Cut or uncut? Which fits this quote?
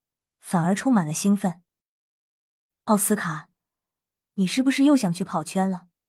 uncut